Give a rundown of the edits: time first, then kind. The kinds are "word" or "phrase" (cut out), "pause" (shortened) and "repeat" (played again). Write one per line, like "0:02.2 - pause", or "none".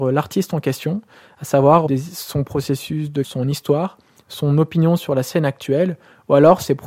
0:01.9 - word
0:03.2 - word